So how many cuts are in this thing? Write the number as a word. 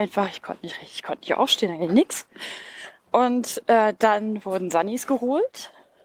one